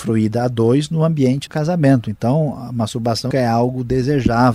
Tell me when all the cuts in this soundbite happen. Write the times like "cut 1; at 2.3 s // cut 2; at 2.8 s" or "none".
cut 1; at 1.5 s // cut 2; at 3.3 s